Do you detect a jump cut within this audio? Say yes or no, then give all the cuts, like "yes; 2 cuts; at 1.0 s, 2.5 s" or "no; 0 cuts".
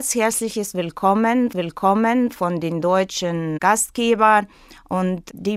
yes; 1 cut; at 1.5 s